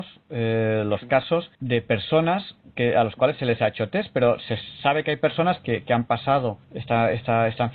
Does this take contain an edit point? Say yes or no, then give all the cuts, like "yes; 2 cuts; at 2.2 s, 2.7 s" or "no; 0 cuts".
yes; 3 cuts; at 1.5 s, 4.8 s, 6.6 s